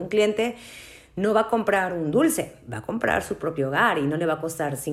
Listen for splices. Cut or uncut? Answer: uncut